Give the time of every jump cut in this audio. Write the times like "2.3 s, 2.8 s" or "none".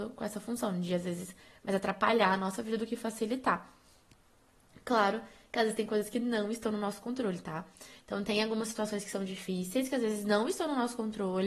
none